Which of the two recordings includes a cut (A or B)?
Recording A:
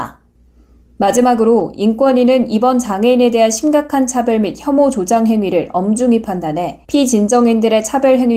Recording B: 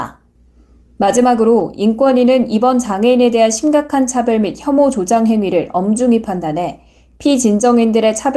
A